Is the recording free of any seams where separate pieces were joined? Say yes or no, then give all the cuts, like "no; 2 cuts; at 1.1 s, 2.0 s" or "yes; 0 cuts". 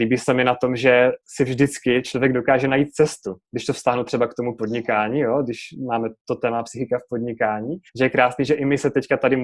no; 2 cuts; at 1.2 s, 7.9 s